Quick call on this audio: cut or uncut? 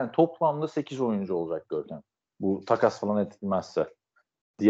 uncut